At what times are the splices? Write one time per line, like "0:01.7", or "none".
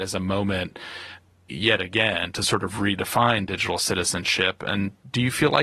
none